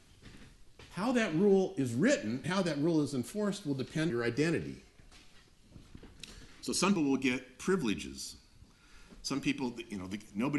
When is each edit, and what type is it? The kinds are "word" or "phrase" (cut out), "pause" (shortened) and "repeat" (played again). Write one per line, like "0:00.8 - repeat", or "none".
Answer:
0:02.4 - word
0:04.1 - word
0:07.0 - word